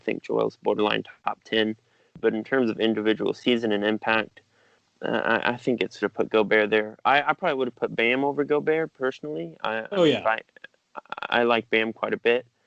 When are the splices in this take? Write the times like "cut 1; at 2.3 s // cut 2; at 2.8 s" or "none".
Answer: cut 1; at 6.0 s